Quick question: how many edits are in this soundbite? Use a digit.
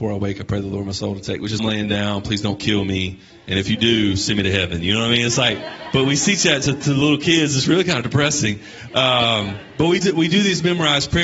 1